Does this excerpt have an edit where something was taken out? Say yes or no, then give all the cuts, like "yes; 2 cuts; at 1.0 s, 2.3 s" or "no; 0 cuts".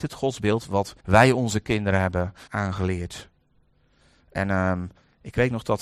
yes; 2 cuts; at 1.0 s, 2.5 s